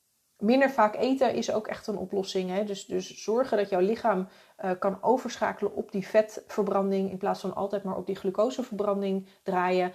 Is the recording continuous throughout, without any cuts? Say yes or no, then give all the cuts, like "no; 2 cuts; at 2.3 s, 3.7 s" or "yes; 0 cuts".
yes; 0 cuts